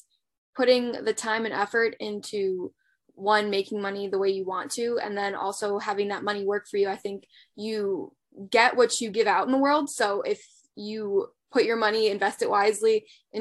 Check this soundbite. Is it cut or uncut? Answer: uncut